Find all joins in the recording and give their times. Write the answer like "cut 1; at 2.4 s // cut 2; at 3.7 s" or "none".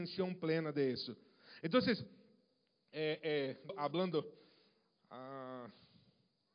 cut 1; at 3.7 s